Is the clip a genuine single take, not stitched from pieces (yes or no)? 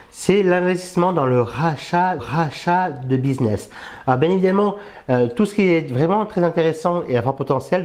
no